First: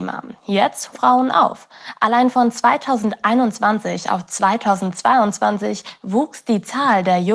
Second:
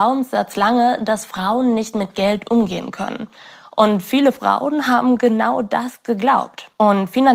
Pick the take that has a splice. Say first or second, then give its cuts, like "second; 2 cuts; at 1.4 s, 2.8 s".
first; 1 cut; at 0.9 s